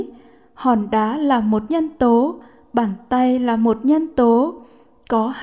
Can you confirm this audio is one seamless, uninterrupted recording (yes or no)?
yes